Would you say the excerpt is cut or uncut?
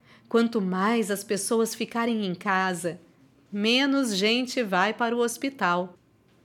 uncut